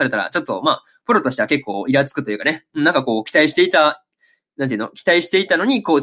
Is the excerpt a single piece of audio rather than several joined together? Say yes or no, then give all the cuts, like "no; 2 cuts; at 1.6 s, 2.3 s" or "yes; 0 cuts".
yes; 0 cuts